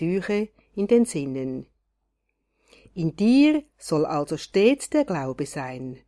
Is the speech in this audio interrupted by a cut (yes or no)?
no